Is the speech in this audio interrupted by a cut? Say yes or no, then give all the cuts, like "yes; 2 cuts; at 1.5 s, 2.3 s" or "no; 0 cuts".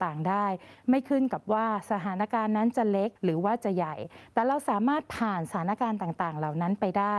yes; 1 cut; at 3.2 s